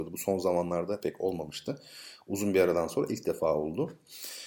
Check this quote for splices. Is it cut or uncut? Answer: uncut